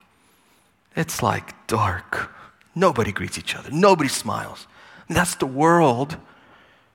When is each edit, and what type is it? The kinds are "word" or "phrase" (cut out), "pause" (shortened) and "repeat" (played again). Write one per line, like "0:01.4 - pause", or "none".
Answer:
none